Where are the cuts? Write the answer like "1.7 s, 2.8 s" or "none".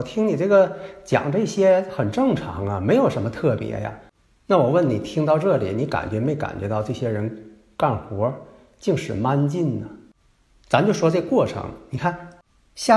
none